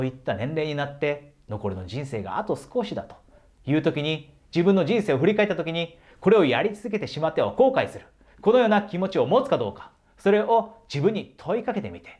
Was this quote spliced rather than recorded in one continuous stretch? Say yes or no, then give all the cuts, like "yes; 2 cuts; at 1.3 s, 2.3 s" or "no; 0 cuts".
no; 0 cuts